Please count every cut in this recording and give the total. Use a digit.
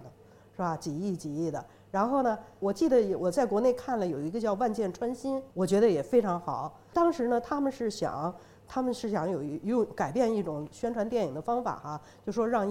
2